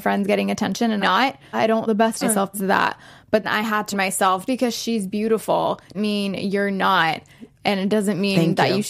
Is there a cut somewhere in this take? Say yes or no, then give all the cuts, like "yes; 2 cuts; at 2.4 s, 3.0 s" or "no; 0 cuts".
yes; 9 cuts; at 1.0 s, 1.5 s, 1.9 s, 2.2 s, 2.5 s, 3.4 s, 3.9 s, 4.5 s, 5.9 s